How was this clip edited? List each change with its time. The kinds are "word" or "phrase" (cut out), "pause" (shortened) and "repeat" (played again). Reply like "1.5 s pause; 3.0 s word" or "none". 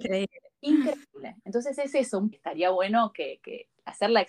2.3 s phrase